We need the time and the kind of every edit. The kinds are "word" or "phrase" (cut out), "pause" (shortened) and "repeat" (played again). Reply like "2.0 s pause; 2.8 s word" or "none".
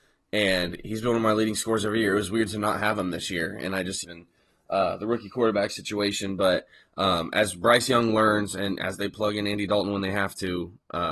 4.0 s phrase